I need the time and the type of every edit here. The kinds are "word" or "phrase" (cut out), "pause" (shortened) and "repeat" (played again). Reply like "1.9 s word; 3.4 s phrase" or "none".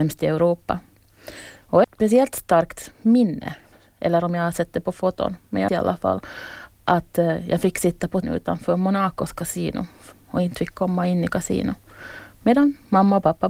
1.8 s word; 3.7 s pause; 5.7 s word; 6.7 s pause; 8.2 s word; 10.1 s phrase